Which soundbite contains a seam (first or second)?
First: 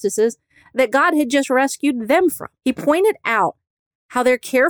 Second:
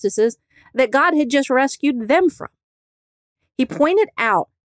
first